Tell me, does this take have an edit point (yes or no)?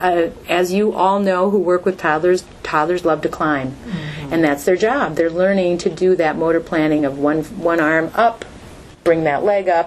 no